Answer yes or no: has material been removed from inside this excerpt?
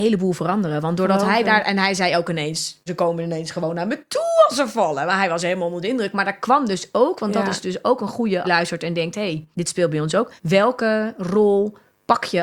yes